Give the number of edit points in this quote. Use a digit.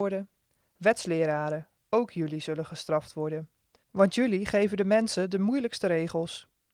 0